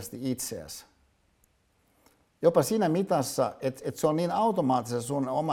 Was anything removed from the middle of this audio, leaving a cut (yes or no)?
no